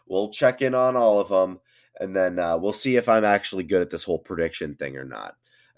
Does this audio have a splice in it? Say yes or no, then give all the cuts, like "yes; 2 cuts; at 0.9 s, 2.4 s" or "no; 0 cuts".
no; 0 cuts